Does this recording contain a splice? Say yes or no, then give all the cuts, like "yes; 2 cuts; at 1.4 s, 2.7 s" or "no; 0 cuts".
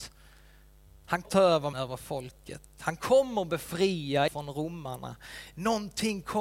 yes; 3 cuts; at 1.2 s, 1.7 s, 4.3 s